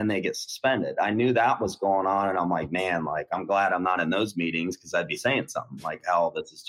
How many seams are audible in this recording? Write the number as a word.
zero